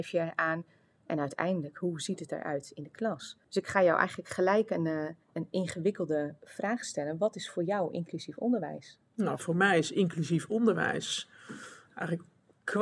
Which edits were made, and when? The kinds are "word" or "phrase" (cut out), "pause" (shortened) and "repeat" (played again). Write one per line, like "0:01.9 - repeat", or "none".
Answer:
0:03.4 - pause
0:05.2 - pause
0:09.1 - pause